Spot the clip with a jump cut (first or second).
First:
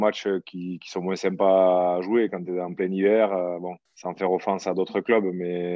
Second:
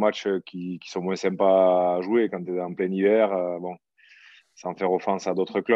first